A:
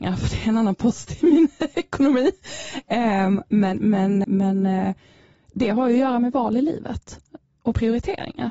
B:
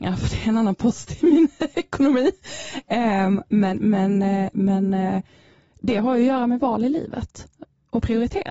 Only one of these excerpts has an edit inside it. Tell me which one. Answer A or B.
A